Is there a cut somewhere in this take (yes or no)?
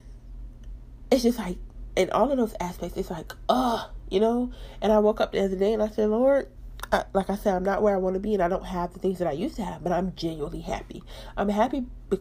no